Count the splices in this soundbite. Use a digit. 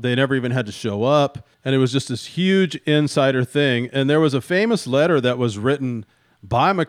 1